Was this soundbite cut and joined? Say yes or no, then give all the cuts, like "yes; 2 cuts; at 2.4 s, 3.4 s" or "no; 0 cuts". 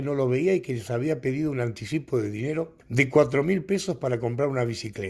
yes; 1 cut; at 2.8 s